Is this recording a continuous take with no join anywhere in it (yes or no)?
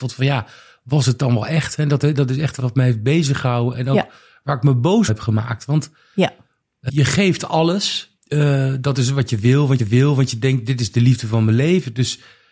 no